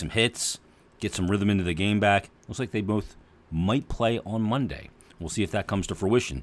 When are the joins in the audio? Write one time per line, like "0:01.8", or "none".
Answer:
none

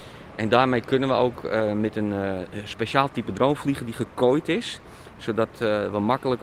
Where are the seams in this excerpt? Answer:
none

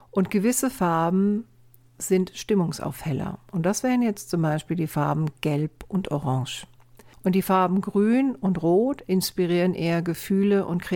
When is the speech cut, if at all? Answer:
none

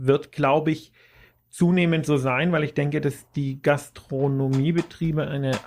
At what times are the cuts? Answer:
none

